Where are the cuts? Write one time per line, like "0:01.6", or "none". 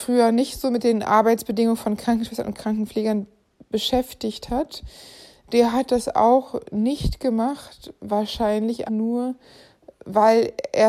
0:08.9